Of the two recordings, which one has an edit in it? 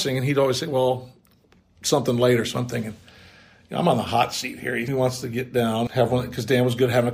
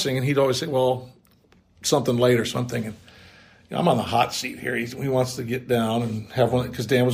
first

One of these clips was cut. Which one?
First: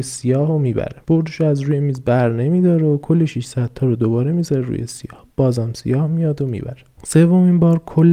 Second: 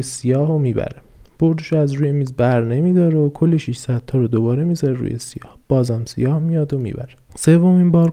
first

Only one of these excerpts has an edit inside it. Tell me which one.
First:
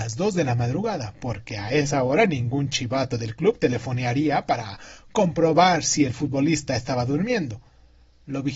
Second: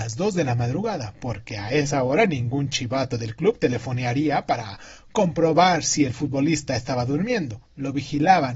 second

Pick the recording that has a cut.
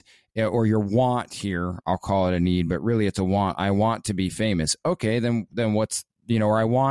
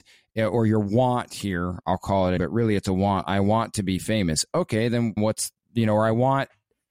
second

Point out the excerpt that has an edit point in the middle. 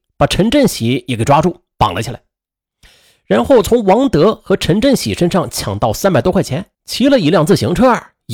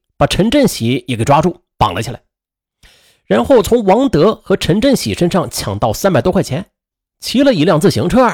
first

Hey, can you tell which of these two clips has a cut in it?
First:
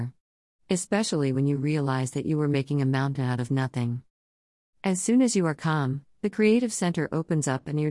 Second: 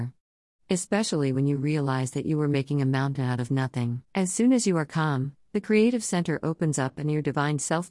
second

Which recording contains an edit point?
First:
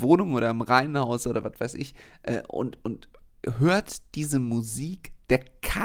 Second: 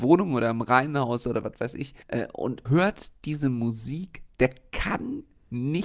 second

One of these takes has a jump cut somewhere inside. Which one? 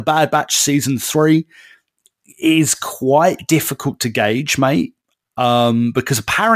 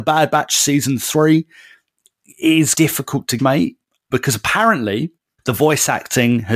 second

